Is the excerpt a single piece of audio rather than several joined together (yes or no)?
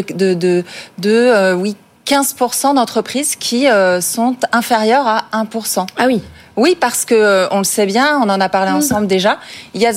yes